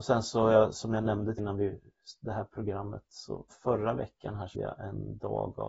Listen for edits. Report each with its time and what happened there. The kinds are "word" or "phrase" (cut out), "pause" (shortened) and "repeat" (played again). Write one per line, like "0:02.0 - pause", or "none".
0:01.4 - word
0:03.5 - word
0:04.5 - word